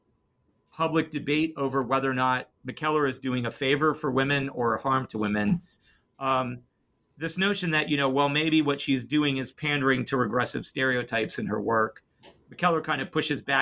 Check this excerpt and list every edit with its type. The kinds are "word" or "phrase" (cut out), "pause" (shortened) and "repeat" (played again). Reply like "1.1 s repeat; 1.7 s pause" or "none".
none